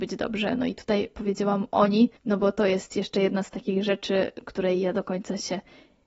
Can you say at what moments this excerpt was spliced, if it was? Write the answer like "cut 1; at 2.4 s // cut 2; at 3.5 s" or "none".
cut 1; at 2.2 s

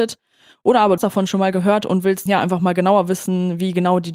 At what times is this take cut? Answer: cut 1; at 1.0 s // cut 2; at 2.3 s

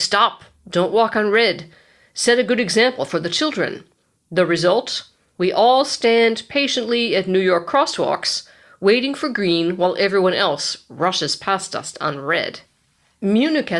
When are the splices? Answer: none

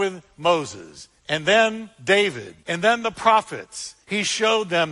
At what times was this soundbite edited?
cut 1; at 1.2 s // cut 2; at 2.6 s // cut 3; at 4.0 s

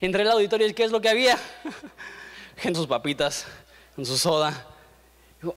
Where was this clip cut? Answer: cut 1; at 2.7 s

